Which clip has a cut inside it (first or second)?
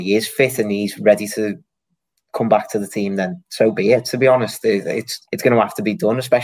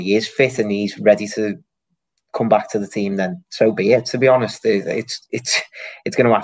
first